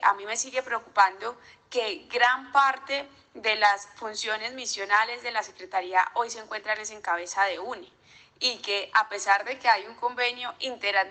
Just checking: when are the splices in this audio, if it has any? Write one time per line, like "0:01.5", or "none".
none